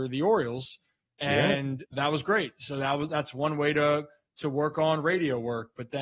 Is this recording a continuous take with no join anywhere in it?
yes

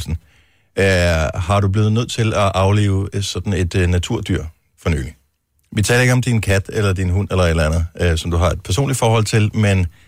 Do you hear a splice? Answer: no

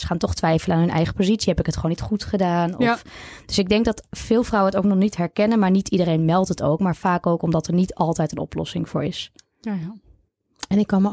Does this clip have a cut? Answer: no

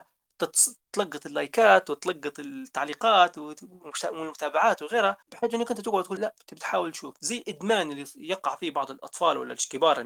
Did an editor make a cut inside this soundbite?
yes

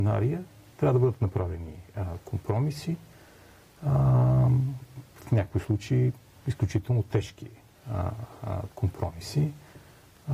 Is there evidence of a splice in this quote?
no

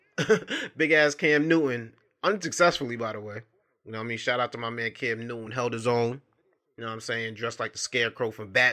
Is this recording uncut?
yes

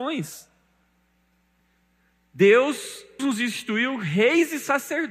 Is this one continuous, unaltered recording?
no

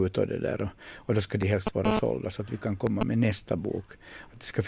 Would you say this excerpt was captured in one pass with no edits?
yes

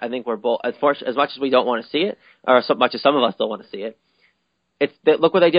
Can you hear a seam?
no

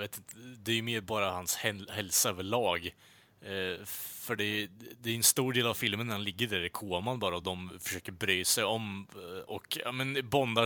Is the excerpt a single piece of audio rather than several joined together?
yes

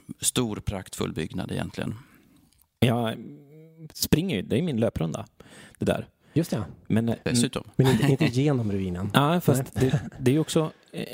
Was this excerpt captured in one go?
yes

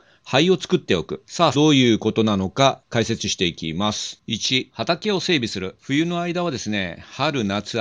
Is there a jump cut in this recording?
yes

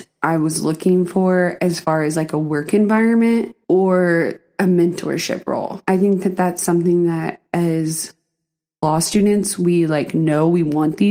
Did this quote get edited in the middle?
yes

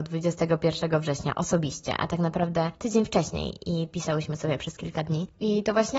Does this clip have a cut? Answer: no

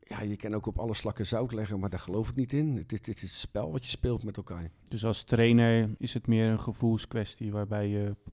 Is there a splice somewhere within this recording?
yes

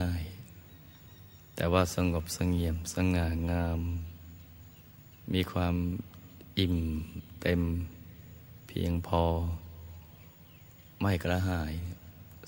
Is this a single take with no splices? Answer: no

